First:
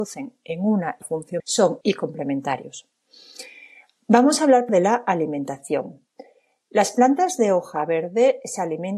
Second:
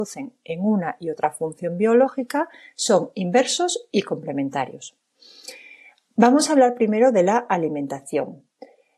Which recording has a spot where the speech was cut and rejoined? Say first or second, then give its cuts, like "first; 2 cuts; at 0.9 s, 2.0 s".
first; 4 cuts; at 1.0 s, 1.4 s, 1.8 s, 4.7 s